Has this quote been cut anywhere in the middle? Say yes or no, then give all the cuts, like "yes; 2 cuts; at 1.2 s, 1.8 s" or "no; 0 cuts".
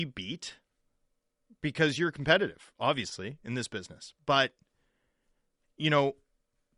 no; 0 cuts